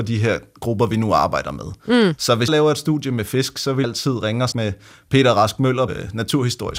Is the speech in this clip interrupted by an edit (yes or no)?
yes